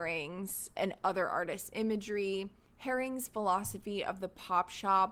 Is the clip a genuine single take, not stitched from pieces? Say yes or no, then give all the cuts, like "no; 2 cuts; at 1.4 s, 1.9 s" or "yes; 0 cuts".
yes; 0 cuts